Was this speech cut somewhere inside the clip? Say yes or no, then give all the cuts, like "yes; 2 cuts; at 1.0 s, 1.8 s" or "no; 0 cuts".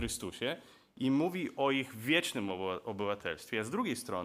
no; 0 cuts